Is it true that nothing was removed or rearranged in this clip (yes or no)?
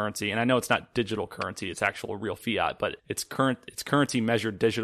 no